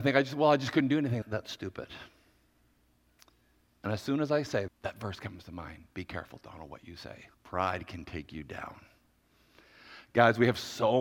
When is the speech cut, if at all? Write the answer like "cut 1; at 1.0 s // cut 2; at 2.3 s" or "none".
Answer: cut 1; at 1.2 s // cut 2; at 4.7 s // cut 3; at 7.3 s